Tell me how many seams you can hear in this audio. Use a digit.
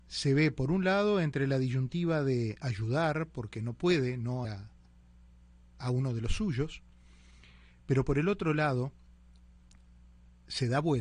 1